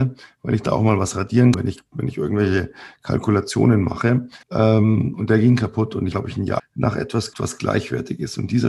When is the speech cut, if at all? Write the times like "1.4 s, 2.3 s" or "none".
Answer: 1.5 s, 4.4 s, 6.1 s, 6.6 s, 7.3 s